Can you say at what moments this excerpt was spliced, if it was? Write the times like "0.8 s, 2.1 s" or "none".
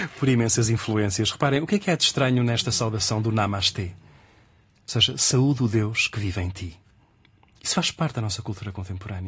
none

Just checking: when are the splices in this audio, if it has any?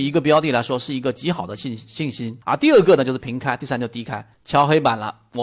2.4 s, 4.3 s

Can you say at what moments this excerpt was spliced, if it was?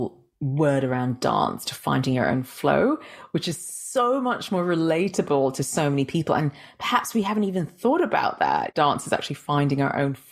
none

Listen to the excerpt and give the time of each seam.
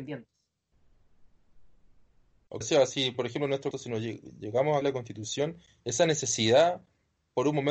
2.6 s, 3.7 s, 4.8 s

